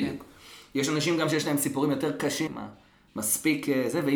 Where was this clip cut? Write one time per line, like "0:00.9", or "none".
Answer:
0:02.5